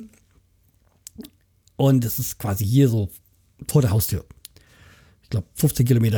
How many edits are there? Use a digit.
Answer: 0